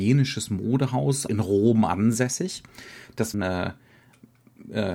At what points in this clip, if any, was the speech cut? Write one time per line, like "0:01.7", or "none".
0:01.3
0:03.3